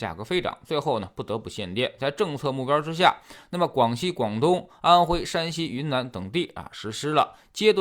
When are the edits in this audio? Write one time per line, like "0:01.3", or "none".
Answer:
none